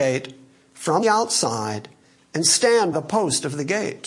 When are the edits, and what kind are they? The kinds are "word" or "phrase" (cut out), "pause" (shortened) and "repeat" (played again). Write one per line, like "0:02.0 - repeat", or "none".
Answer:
0:01.0 - word
0:02.9 - word